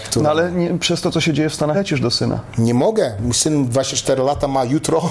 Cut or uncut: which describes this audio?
cut